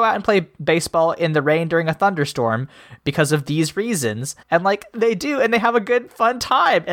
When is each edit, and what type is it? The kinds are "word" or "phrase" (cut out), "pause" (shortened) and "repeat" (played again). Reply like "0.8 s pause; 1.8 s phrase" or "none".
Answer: 4.4 s pause

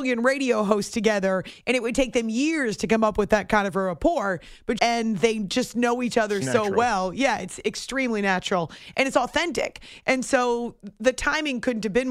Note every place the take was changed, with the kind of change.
4.8 s phrase

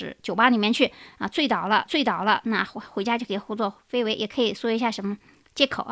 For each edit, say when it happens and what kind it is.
1.9 s repeat

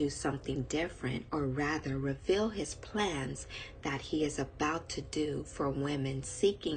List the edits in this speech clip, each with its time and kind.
none

